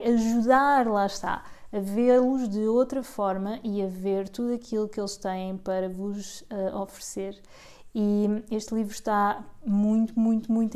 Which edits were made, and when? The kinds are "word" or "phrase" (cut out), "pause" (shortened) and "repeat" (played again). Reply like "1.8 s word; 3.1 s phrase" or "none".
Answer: none